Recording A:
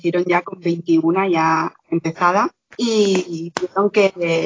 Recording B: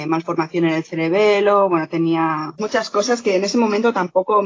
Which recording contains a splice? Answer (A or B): B